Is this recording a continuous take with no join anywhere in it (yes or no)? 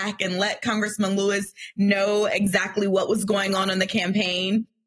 yes